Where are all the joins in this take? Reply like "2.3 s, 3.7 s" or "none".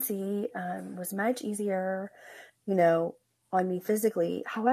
none

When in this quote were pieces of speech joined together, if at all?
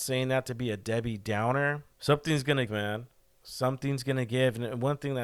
1.9 s, 2.7 s

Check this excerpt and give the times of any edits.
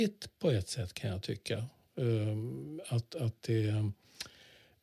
none

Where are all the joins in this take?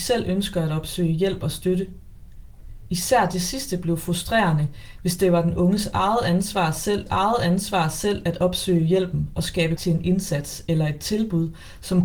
7.1 s, 9.8 s

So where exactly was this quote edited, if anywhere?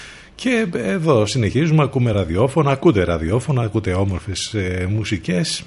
none

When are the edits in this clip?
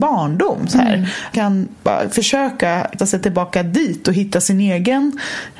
1.3 s, 3.0 s

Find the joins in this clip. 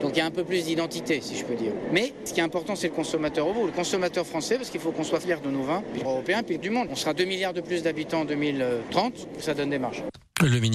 6.0 s, 6.6 s, 9.4 s

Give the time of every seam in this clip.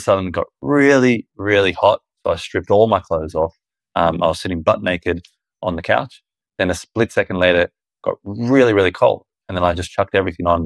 none

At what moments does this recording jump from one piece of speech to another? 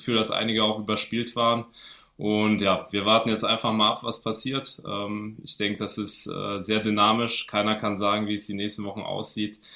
none

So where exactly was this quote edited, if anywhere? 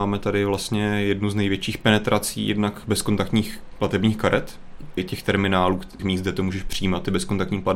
5.0 s, 6.0 s

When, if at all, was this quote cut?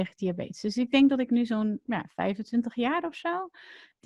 none

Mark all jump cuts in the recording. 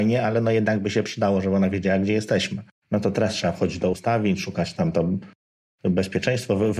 none

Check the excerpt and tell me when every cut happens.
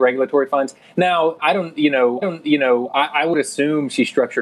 2.2 s

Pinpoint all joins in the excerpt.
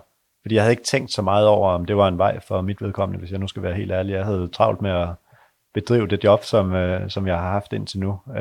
none

